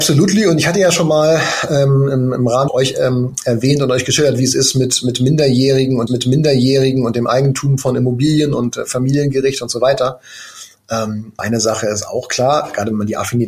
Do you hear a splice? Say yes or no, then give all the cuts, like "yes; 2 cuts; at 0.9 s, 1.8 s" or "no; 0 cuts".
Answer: yes; 3 cuts; at 2.7 s, 6.1 s, 11.4 s